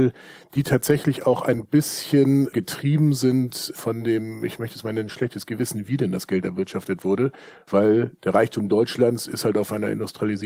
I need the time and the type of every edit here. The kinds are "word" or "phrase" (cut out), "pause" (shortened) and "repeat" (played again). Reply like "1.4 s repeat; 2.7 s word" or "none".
none